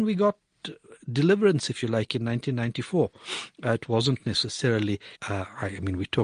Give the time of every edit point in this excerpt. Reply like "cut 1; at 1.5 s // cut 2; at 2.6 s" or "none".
cut 1; at 5.1 s